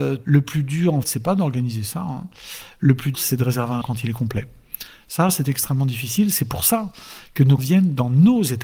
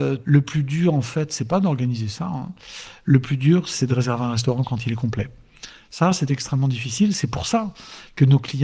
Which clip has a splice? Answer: first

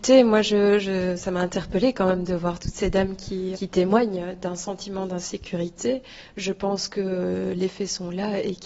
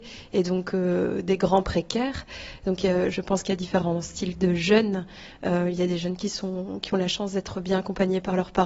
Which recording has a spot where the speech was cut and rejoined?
first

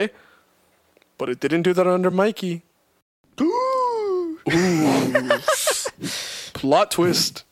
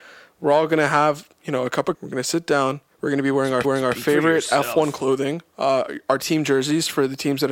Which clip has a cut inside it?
second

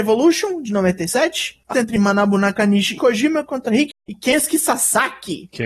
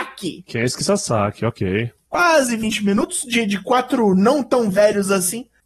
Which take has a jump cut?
first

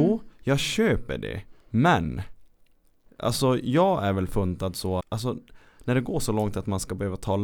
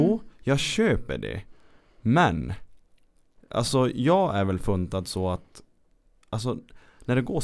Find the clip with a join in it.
first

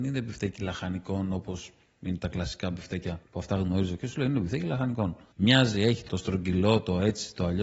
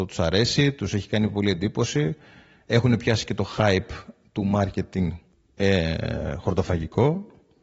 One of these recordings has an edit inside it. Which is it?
first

